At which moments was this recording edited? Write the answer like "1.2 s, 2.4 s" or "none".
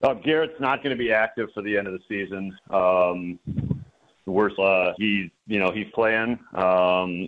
2.6 s, 4.6 s, 5.0 s, 5.9 s